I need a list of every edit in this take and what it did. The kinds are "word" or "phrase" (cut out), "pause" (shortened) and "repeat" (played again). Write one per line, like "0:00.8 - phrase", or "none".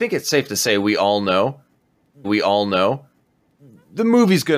0:02.2 - repeat